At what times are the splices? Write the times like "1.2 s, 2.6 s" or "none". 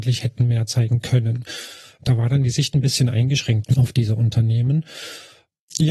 none